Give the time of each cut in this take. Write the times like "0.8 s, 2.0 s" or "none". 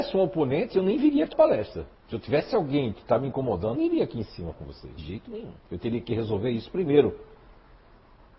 1.3 s, 2.0 s, 3.8 s, 4.5 s, 5.0 s, 5.6 s